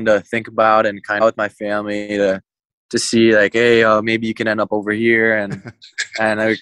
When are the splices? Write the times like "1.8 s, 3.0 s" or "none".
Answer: 1.2 s